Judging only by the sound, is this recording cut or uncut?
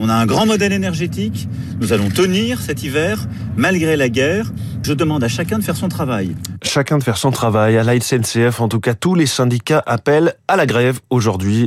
cut